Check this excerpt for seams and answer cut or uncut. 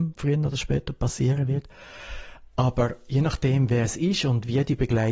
uncut